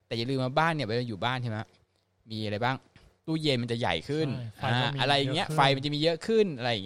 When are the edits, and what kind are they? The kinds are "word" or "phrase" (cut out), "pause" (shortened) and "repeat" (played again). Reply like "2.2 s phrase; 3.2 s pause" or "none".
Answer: none